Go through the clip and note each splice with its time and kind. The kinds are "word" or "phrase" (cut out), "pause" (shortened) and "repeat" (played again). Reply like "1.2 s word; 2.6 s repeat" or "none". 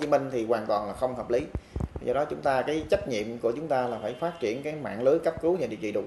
none